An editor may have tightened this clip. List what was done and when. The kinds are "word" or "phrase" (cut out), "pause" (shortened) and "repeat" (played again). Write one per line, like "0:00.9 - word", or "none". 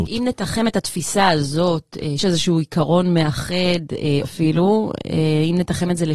0:02.2 - word
0:04.2 - word